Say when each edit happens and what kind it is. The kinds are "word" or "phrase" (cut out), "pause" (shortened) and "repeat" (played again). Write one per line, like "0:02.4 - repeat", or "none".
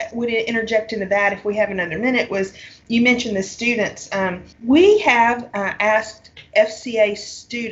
0:04.5 - pause